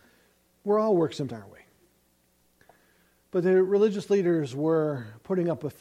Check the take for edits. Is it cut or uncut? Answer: cut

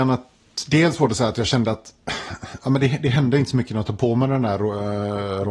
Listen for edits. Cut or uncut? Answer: uncut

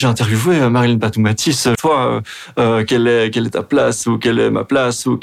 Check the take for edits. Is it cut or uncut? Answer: cut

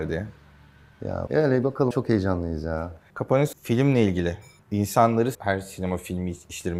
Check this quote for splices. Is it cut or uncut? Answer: cut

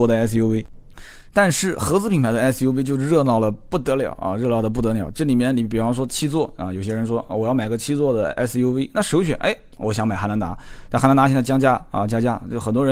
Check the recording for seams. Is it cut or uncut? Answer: uncut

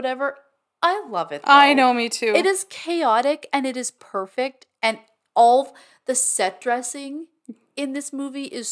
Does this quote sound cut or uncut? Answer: uncut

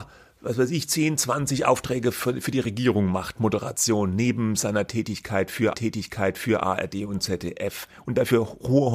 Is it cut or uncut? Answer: cut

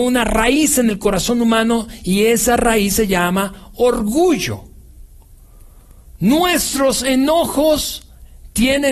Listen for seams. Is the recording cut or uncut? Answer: uncut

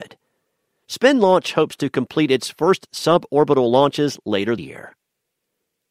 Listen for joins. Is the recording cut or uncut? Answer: cut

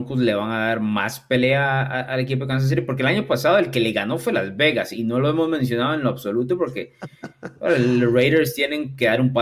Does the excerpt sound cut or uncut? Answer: uncut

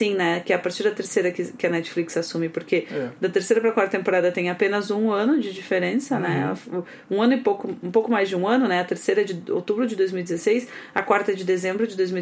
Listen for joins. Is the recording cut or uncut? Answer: uncut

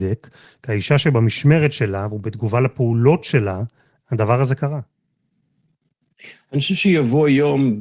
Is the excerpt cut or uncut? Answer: uncut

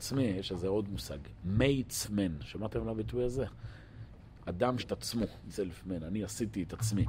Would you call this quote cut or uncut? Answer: cut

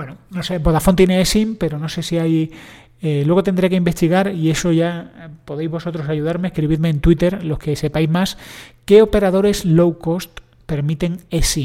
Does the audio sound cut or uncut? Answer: uncut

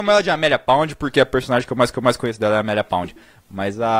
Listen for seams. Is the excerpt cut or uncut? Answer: cut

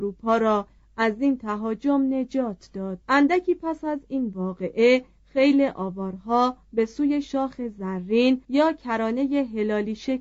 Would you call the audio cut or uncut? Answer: cut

